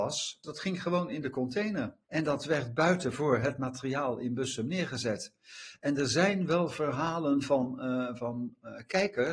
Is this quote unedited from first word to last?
no; 1 cut; at 2.0 s

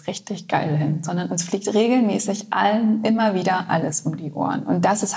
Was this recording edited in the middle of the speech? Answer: no; 0 cuts

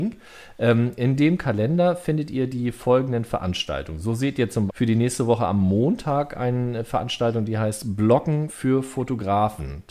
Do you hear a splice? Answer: yes; 1 cut; at 4.7 s

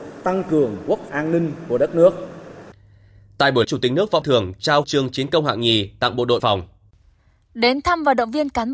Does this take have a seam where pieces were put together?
yes; 5 cuts; at 1.1 s, 3.6 s, 4.2 s, 4.8 s, 6.4 s

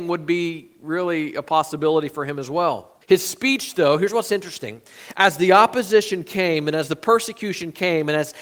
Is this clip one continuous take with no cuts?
no; 1 cut; at 3.0 s

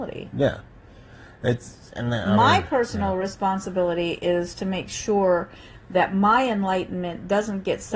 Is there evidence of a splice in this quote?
no; 0 cuts

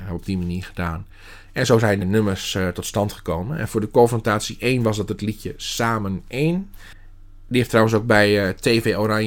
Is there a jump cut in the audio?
yes; 1 cut; at 2.0 s

